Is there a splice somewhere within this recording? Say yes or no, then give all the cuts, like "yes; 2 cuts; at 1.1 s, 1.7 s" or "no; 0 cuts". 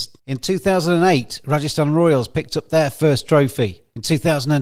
no; 0 cuts